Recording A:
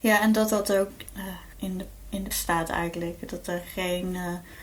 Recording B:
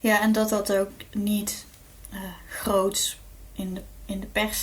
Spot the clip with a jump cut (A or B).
A